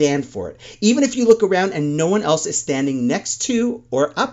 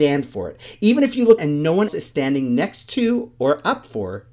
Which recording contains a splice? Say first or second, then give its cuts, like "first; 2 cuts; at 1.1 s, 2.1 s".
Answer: second; 2 cuts; at 1.4 s, 1.9 s